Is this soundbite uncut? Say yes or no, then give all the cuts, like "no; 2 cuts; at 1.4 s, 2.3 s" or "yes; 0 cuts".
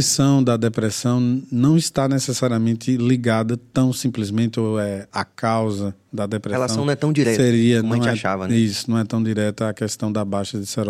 yes; 0 cuts